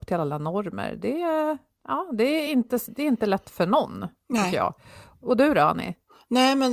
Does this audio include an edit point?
no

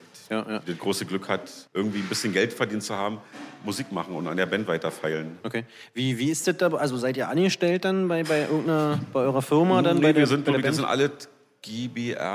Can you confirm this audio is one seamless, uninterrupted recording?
no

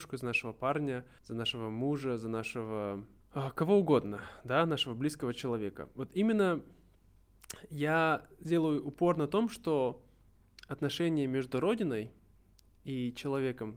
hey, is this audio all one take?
no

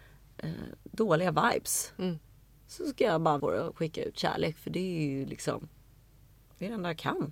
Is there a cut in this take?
yes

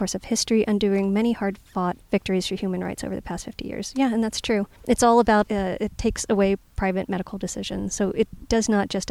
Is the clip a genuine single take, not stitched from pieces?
no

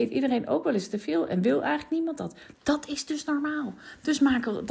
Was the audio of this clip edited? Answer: no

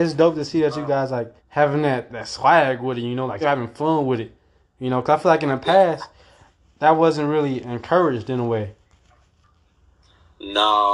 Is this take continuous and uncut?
no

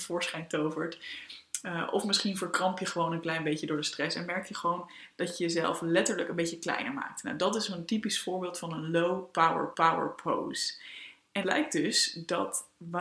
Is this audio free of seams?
no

